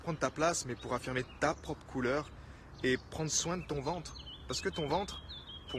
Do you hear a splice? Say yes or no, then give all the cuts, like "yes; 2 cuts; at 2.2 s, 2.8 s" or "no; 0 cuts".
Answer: no; 0 cuts